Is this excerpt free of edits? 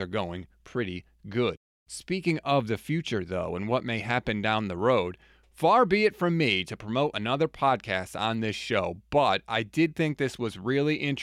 yes; 0 cuts

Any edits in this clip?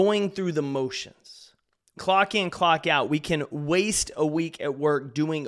yes; 1 cut; at 2.0 s

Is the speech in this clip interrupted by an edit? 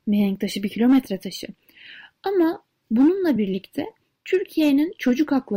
no; 0 cuts

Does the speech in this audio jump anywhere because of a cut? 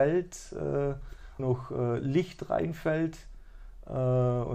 yes; 1 cut; at 1.4 s

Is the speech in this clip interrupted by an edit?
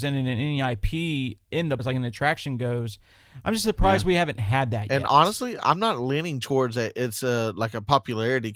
yes; 1 cut; at 1.8 s

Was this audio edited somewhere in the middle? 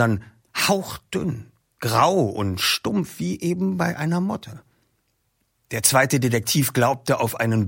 no; 0 cuts

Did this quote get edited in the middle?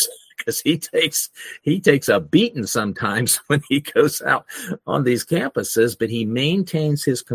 no; 0 cuts

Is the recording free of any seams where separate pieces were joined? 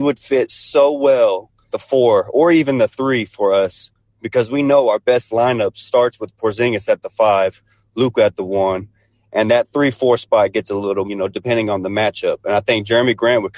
no; 3 cuts; at 1.7 s, 9.5 s, 11.0 s

